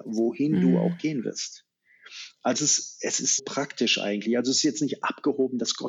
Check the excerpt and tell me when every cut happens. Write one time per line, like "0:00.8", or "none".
0:02.5
0:03.4

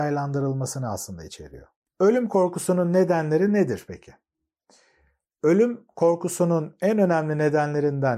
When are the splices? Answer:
none

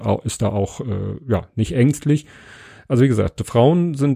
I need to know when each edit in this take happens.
none

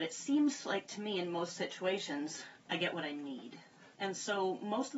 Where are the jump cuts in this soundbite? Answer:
0:03.9

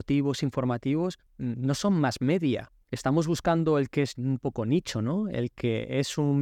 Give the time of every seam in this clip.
0:01.3
0:02.8

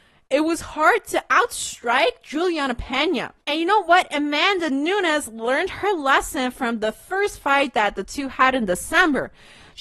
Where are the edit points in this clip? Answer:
0:03.4

